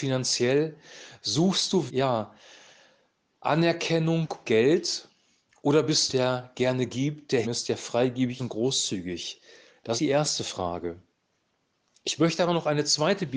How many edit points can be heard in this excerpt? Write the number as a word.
six